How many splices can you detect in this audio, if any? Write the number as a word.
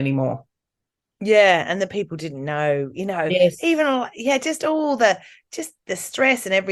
zero